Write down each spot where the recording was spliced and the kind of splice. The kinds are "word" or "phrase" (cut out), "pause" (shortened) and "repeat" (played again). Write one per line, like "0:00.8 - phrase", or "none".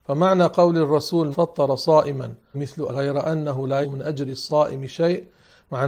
0:01.3 - word
0:02.5 - word
0:02.9 - word
0:03.8 - word